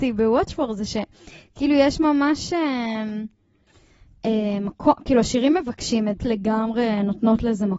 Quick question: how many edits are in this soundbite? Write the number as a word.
one